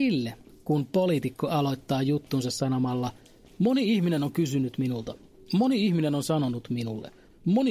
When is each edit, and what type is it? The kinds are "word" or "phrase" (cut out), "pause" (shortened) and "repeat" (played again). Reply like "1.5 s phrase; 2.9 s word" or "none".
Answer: none